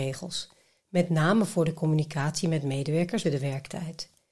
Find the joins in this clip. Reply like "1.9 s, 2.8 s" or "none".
3.2 s